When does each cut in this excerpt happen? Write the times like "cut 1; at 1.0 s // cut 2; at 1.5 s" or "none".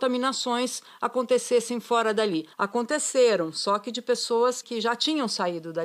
cut 1; at 2.5 s // cut 2; at 4.6 s